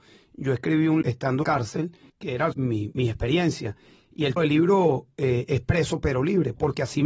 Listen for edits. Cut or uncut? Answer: cut